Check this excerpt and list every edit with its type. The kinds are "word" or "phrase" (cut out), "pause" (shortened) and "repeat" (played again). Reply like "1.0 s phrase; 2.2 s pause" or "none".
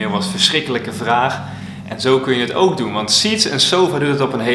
none